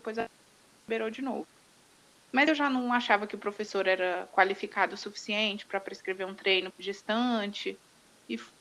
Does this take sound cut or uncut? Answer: cut